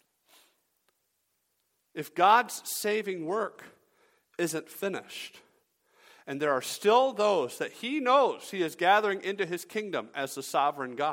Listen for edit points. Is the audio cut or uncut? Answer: uncut